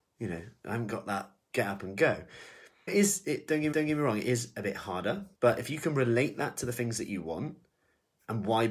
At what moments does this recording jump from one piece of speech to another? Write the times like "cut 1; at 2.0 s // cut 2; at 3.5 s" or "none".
cut 1; at 1.5 s // cut 2; at 2.9 s // cut 3; at 3.7 s // cut 4; at 5.3 s